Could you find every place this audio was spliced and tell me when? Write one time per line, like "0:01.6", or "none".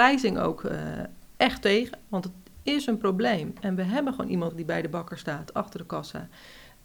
0:04.5

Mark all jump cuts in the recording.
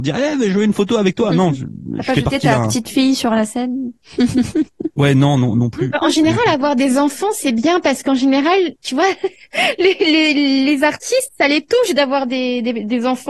0:08.8

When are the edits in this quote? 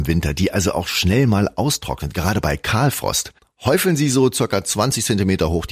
none

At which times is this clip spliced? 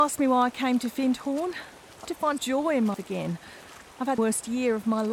0:02.0
0:02.4
0:02.9
0:04.2

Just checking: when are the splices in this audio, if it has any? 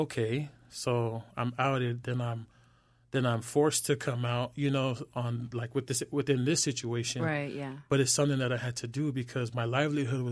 none

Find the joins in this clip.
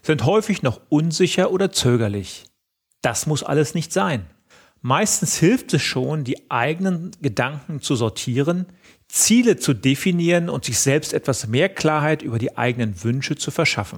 none

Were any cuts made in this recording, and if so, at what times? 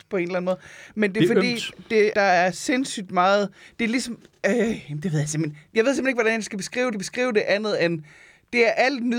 0:02.1
0:06.9

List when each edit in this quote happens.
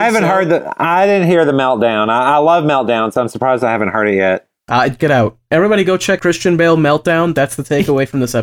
0:05.0
0:06.2

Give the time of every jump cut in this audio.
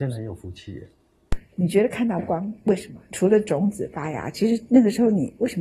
none

